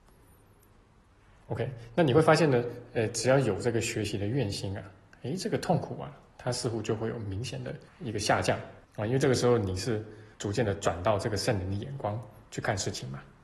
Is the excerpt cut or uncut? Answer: cut